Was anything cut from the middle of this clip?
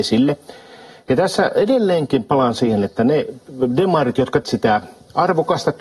yes; 1 cut; at 4.4 s

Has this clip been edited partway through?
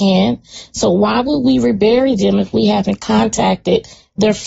no; 0 cuts

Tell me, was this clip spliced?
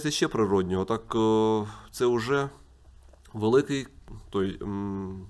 no; 0 cuts

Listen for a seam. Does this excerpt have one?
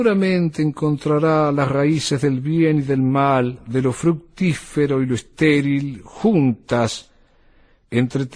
no; 0 cuts

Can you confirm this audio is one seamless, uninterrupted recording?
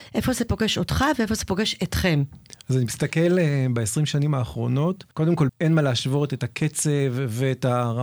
no; 2 cuts; at 5.1 s, 5.5 s

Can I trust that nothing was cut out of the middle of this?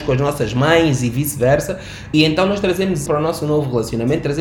no; 2 cuts; at 2.1 s, 3.1 s

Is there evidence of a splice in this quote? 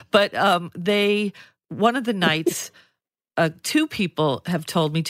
no; 0 cuts

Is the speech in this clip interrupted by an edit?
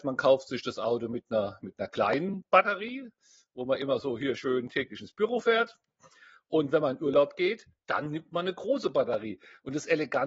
no; 0 cuts

